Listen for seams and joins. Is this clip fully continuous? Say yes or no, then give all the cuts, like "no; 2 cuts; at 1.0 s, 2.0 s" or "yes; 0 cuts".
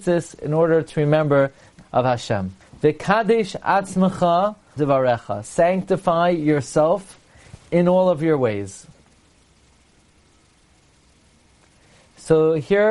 no; 3 cuts; at 1.8 s, 2.6 s, 4.8 s